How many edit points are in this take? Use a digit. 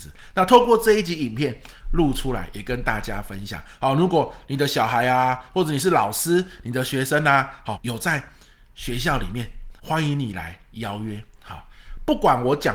2